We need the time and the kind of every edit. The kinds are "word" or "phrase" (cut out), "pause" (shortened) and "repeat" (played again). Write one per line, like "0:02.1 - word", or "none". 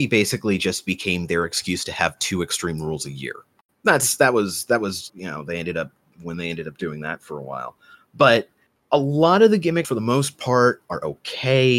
0:05.1 - word
0:09.8 - word